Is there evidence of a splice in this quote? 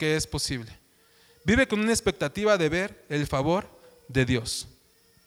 no; 0 cuts

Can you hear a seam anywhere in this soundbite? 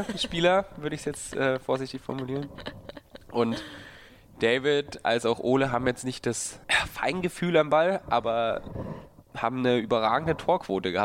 yes; 3 cuts; at 3.2 s, 6.6 s, 9.2 s

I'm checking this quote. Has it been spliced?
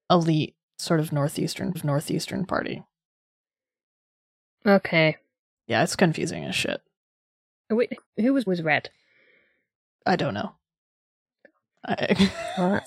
yes; 3 cuts; at 1.7 s, 8.0 s, 8.5 s

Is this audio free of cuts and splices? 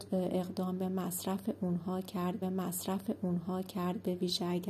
no; 1 cut; at 2.4 s

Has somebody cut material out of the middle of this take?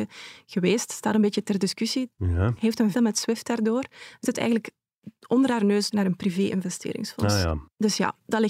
yes; 3 cuts; at 2.9 s, 4.2 s, 5.9 s

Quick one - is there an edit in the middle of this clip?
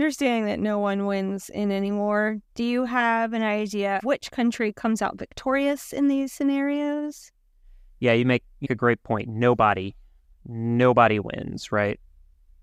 yes; 2 cuts; at 4.0 s, 8.6 s

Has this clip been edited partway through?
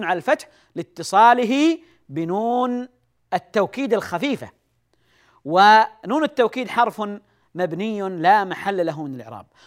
no; 0 cuts

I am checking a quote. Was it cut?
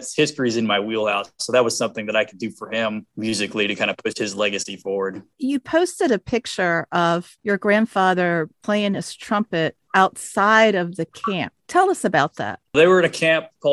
no; 0 cuts

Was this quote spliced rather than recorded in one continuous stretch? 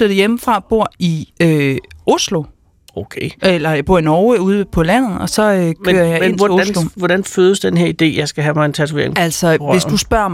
yes; 1 cut; at 1.3 s

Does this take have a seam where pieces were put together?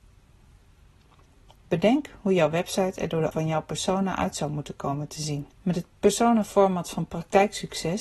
yes; 2 cuts; at 3.3 s, 5.5 s

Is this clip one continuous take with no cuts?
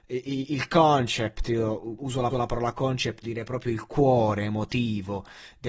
no; 3 cuts; at 2.0 s, 2.3 s, 3.2 s

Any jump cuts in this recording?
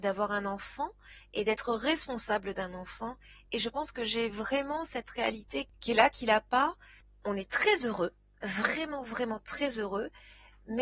no; 0 cuts

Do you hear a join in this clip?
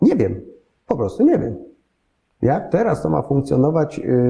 no; 0 cuts

